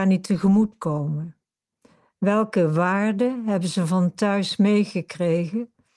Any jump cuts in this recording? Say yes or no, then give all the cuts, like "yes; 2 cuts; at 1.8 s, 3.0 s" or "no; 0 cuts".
no; 0 cuts